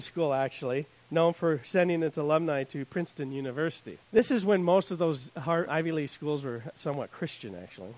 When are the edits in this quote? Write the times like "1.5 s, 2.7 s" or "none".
4.1 s, 5.7 s